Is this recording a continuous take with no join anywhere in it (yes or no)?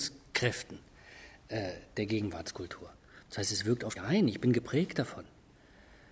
no